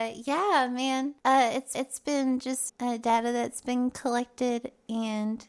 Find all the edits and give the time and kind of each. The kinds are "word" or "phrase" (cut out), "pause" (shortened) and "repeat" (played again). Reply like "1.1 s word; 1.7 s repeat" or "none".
1.2 s pause; 1.7 s repeat; 2.7 s phrase